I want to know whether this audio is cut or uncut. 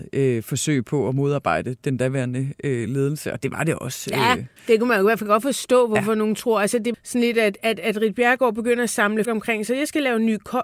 cut